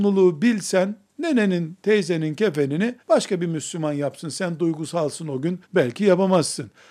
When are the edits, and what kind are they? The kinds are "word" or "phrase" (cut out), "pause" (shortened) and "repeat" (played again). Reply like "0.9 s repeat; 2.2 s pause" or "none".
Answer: 3.0 s pause; 5.6 s pause